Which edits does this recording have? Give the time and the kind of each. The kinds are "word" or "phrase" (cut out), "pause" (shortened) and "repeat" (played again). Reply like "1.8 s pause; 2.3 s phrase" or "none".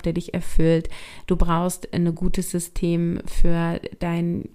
none